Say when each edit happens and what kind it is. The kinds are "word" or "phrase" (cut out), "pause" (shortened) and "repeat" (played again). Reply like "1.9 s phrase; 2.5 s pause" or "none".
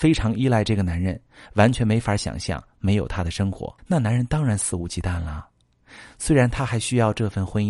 3.8 s pause